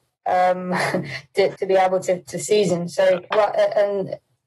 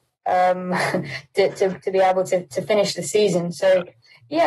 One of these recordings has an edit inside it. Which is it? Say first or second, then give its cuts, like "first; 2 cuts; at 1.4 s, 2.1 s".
first; 3 cuts; at 1.6 s, 2.3 s, 3.3 s